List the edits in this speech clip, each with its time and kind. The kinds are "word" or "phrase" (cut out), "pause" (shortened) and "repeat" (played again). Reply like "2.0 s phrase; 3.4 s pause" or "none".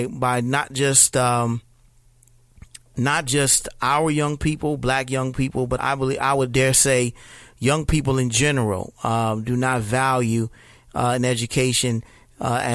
5.8 s word